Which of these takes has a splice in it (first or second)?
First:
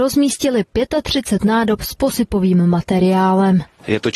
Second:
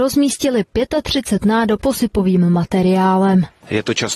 second